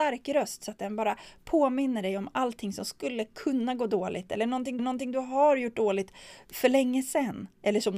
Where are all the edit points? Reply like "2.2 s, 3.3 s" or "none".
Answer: 4.8 s